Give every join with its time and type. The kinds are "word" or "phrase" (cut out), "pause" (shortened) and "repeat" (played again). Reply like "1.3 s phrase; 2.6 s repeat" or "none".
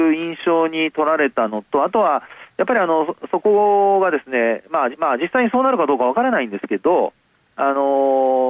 4.9 s repeat